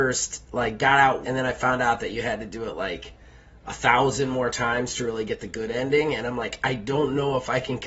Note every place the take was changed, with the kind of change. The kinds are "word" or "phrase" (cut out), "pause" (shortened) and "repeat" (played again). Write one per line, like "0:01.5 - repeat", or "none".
0:01.2 - word